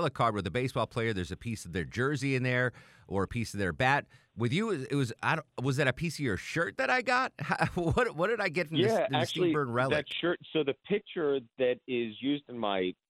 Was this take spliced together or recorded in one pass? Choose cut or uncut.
uncut